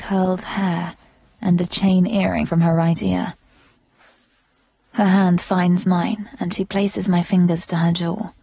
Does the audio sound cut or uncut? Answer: cut